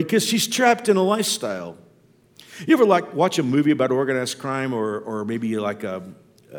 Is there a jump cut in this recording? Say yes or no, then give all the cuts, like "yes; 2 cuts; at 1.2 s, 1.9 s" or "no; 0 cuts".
no; 0 cuts